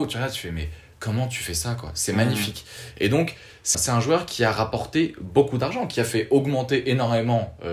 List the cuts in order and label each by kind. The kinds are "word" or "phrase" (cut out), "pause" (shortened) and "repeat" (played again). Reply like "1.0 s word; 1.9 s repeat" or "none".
3.7 s word